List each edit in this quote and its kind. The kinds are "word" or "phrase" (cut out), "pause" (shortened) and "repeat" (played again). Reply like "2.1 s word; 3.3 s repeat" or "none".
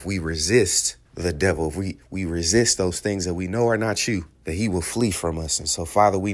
1.1 s pause; 4.3 s pause